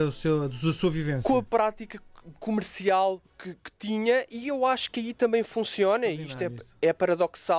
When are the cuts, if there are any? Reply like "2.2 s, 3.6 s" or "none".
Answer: none